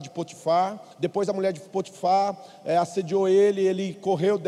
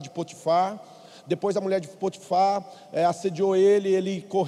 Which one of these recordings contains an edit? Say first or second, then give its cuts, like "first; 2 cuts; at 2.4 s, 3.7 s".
first; 1 cut; at 0.9 s